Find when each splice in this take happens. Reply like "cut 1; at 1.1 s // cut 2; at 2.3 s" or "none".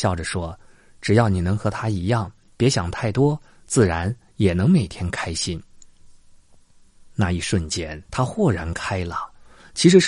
cut 1; at 8.1 s